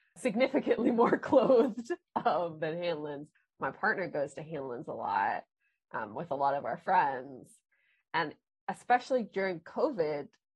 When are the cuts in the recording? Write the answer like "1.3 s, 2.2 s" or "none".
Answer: none